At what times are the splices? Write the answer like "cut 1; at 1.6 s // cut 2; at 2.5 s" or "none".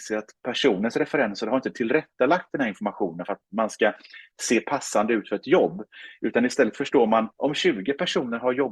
cut 1; at 7.3 s